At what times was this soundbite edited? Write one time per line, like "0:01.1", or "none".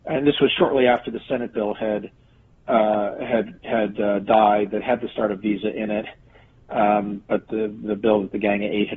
none